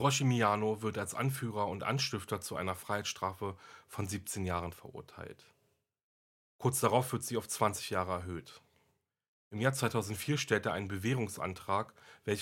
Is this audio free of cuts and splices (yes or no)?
yes